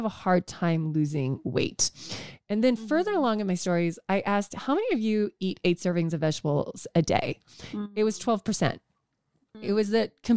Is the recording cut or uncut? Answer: uncut